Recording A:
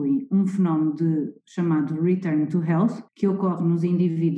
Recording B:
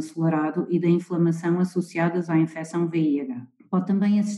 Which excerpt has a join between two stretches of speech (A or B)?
A